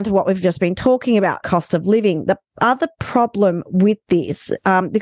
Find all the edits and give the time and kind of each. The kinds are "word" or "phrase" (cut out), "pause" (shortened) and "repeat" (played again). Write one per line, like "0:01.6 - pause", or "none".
0:01.4 - word